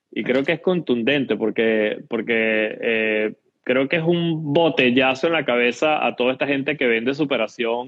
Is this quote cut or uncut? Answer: uncut